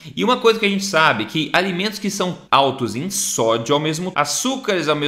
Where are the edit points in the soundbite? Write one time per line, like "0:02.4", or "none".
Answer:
0:02.5
0:04.1